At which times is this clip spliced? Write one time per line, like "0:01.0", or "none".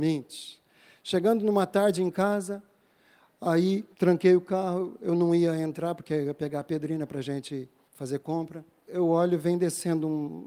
0:03.9
0:07.9